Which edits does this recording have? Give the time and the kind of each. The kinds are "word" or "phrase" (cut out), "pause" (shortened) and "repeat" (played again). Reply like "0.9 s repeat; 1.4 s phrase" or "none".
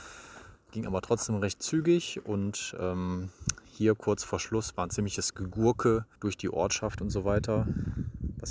6.2 s pause